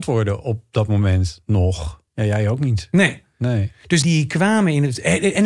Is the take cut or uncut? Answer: cut